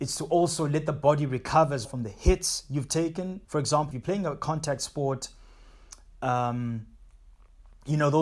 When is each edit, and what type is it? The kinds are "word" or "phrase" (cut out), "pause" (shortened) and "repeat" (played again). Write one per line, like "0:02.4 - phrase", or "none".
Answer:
0:01.8 - word
0:03.4 - pause
0:03.9 - word